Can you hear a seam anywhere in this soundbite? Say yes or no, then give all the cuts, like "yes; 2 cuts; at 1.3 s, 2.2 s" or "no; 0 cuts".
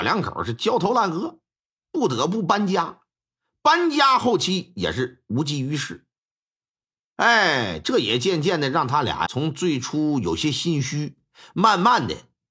yes; 1 cut; at 9.3 s